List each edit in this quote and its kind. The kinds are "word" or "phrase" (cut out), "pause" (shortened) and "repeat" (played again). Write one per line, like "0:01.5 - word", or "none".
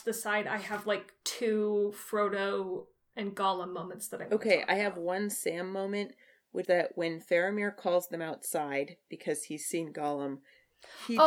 0:06.6 - word